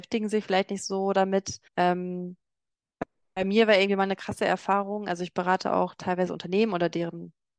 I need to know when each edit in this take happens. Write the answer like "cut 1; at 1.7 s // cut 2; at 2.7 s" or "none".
cut 1; at 1.7 s